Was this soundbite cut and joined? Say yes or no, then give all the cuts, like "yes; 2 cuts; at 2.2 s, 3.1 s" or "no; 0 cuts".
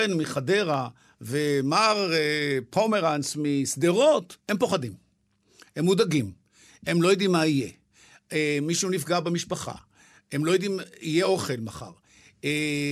yes; 1 cut; at 4.4 s